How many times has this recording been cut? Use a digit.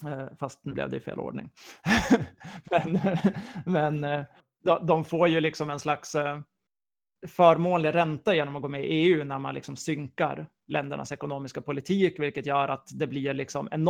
0